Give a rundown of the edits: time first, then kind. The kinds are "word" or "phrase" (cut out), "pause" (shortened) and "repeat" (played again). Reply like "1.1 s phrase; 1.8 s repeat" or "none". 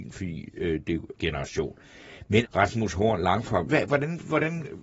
1.1 s word; 2.4 s word; 3.7 s word